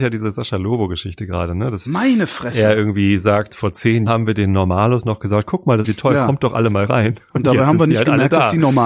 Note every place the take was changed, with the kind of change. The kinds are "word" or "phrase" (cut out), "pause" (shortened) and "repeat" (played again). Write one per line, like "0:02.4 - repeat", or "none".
0:03.5 - word
0:04.1 - word
0:05.8 - word